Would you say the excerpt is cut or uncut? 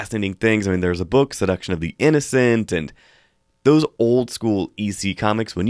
uncut